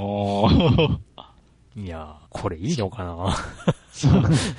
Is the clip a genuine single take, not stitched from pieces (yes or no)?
no